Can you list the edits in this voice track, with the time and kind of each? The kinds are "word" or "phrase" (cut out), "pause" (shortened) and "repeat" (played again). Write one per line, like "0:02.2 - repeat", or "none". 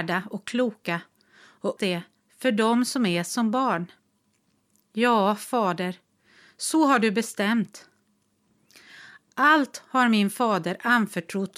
0:01.8 - word